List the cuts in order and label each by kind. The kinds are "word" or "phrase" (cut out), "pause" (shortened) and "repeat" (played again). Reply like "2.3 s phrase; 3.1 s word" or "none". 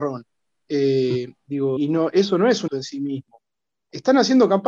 1.8 s word; 2.7 s word